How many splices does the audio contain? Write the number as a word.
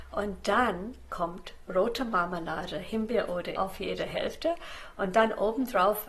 one